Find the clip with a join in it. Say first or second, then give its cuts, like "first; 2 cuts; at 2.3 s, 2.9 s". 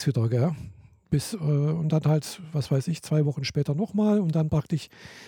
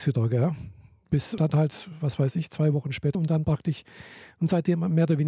second; 2 cuts; at 1.4 s, 3.1 s